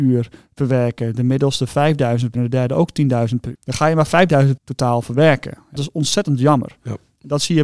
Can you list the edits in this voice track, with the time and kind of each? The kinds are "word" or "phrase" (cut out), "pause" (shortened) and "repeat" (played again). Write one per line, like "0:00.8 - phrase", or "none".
0:02.3 - word
0:03.5 - word
0:04.6 - word
0:05.8 - word